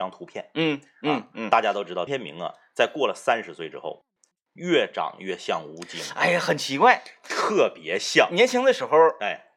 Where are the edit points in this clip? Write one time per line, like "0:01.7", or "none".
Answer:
0:02.1